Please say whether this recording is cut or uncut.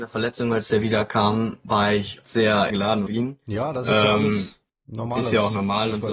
cut